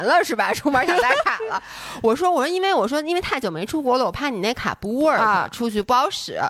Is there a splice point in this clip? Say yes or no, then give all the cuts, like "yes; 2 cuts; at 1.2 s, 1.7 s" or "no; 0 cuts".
no; 0 cuts